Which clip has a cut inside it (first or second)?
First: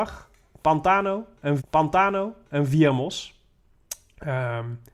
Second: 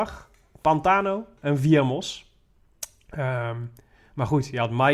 first